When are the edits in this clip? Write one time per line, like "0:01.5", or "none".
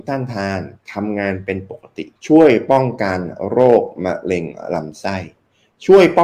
0:02.2